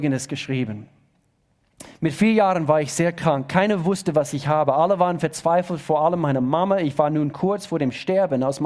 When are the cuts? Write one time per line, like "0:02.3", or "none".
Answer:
none